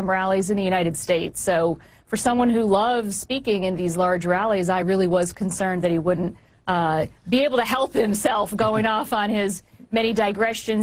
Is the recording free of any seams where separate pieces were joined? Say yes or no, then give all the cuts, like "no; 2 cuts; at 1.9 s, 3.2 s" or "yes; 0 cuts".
yes; 0 cuts